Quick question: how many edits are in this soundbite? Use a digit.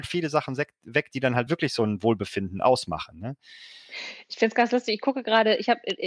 0